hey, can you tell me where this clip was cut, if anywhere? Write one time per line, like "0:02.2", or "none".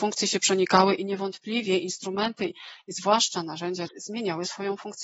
0:02.5
0:03.9